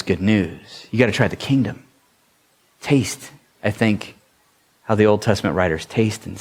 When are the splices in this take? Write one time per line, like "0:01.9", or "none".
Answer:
none